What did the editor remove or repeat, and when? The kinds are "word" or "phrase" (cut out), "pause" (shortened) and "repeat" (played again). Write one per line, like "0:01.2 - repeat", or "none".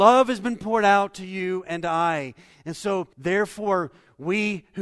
0:03.1 - pause